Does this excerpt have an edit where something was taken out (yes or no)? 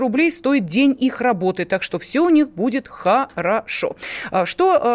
no